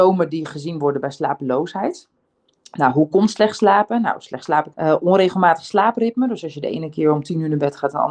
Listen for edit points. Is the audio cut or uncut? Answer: cut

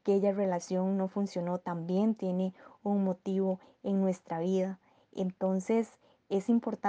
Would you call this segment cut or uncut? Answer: uncut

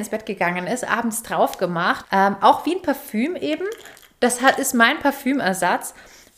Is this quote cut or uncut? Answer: cut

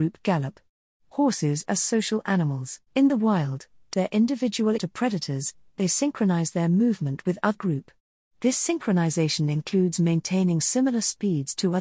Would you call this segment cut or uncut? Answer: cut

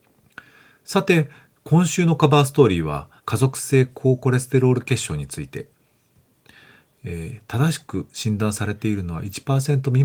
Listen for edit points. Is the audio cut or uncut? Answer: cut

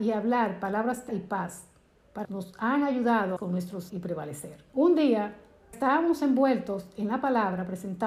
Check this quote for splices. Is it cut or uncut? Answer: cut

